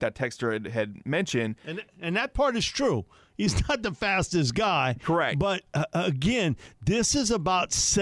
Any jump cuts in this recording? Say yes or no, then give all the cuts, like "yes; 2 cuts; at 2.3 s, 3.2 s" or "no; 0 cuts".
no; 0 cuts